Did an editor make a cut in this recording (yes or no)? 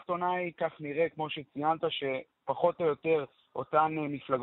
no